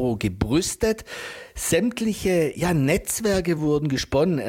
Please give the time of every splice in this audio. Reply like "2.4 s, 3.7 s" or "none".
none